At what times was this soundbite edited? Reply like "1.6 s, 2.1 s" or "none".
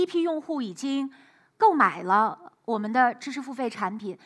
none